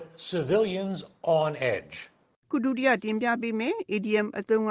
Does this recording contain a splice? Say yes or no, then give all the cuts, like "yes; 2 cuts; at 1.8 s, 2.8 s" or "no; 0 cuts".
no; 0 cuts